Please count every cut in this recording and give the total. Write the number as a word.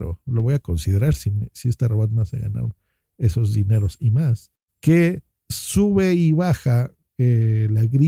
one